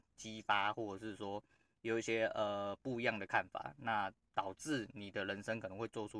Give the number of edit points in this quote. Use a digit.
0